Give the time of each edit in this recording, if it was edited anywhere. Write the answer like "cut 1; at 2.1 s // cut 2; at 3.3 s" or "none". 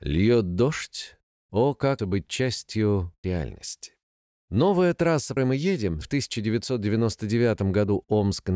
cut 1; at 2.0 s // cut 2; at 3.2 s // cut 3; at 4.1 s // cut 4; at 5.4 s // cut 5; at 6.0 s